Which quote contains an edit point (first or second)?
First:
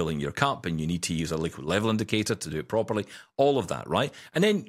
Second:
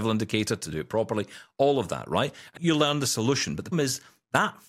second